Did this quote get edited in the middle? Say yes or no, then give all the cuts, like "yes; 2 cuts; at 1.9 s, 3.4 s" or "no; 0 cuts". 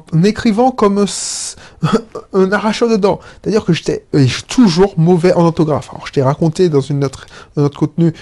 no; 0 cuts